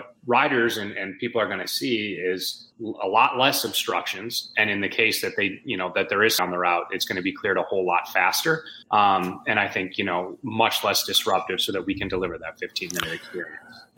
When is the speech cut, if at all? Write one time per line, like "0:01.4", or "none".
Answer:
0:02.7
0:06.4
0:08.8